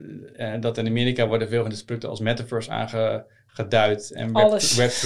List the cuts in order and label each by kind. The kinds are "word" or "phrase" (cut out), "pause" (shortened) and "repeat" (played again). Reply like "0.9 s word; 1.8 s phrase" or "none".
none